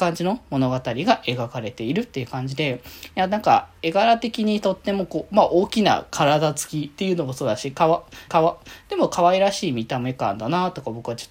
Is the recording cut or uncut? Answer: cut